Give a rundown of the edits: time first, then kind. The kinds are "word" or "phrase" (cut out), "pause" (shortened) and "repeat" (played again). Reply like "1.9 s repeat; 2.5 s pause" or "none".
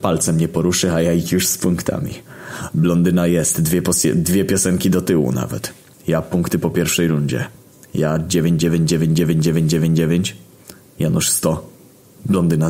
none